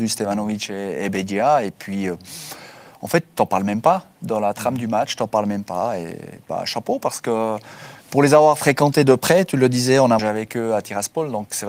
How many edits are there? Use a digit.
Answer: 2